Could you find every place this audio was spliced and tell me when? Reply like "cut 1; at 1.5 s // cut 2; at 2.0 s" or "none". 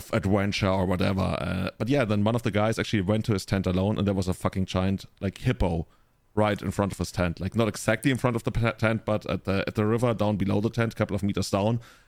none